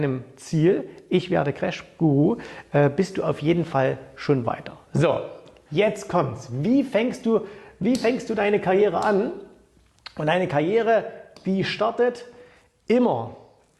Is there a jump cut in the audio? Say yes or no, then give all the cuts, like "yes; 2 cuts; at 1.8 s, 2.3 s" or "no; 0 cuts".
no; 0 cuts